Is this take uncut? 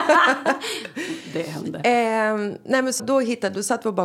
no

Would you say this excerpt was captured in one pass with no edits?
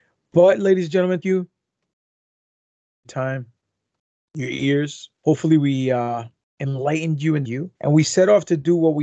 no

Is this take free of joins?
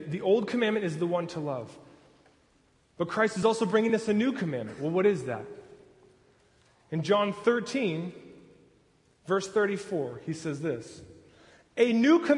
yes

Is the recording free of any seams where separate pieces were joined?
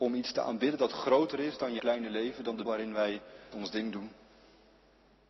no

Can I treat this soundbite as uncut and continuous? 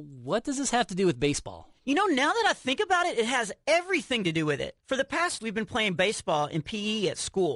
no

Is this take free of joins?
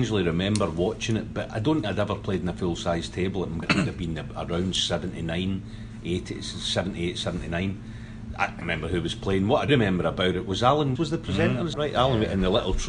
no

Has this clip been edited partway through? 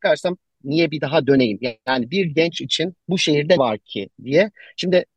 yes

